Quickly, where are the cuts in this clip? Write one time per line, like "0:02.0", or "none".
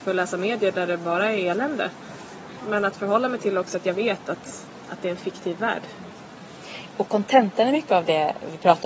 none